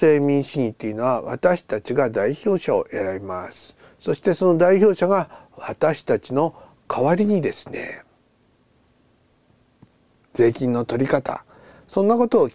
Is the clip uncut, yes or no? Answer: yes